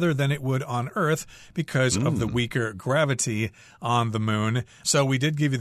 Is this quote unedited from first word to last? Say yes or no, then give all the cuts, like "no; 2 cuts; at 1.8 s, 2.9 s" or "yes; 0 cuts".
yes; 0 cuts